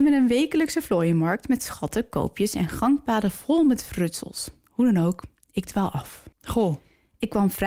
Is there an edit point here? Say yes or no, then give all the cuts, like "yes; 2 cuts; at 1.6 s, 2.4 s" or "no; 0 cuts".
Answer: yes; 1 cut; at 6.3 s